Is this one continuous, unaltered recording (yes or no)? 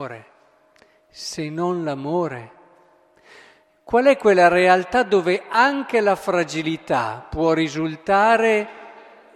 yes